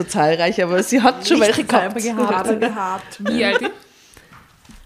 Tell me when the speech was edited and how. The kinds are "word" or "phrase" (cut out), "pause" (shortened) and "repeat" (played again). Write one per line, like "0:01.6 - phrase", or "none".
0:03.6 - word